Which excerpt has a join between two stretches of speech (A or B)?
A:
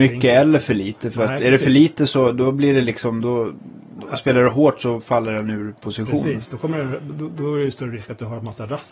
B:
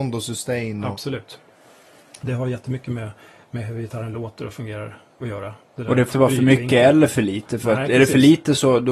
B